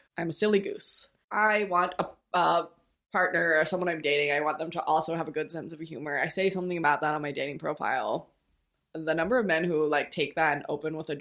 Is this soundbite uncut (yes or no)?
yes